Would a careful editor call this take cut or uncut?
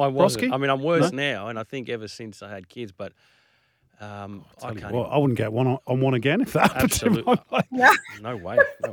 uncut